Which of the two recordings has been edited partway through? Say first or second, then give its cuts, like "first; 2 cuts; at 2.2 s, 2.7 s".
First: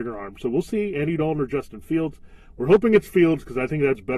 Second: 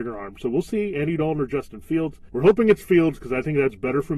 second; 1 cut; at 2.3 s